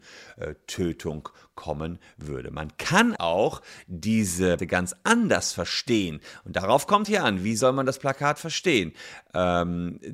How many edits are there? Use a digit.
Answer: 3